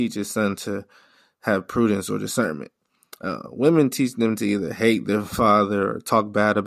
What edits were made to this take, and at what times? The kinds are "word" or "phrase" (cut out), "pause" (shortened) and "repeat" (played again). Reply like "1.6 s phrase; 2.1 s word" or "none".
none